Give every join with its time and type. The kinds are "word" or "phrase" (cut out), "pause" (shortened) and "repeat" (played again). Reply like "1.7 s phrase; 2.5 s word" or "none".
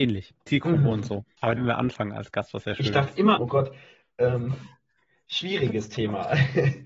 1.6 s phrase; 3.4 s word